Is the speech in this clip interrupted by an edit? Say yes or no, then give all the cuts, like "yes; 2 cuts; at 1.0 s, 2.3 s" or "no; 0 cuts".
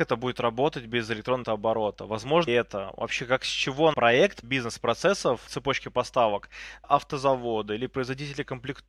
yes; 6 cuts; at 1.4 s, 2.5 s, 3.9 s, 4.4 s, 5.5 s, 6.8 s